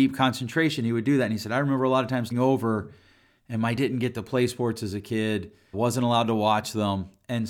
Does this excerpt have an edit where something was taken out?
yes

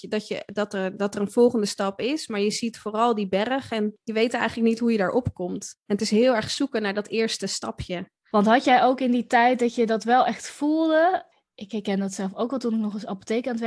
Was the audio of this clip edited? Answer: no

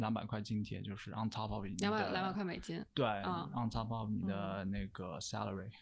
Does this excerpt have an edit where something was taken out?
no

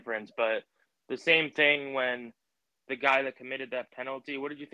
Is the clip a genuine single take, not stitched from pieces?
yes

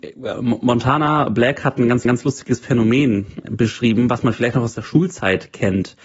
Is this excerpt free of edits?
no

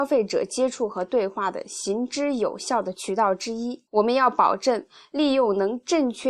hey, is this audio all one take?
no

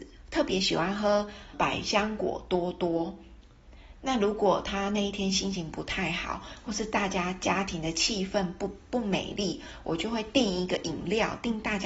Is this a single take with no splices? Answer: no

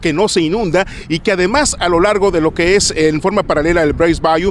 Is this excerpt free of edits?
yes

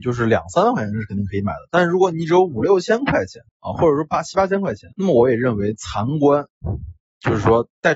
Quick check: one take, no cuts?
no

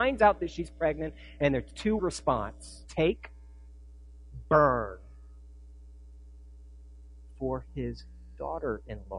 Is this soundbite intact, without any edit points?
no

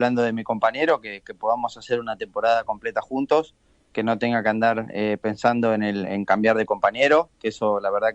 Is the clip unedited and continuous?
yes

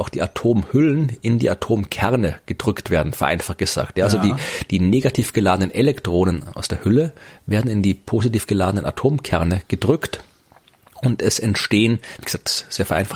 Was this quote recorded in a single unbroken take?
yes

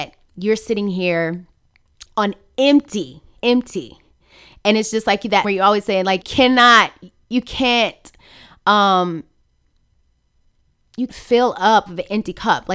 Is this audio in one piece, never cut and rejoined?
no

